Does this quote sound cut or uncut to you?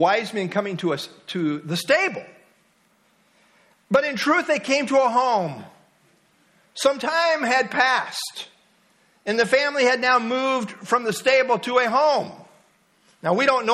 uncut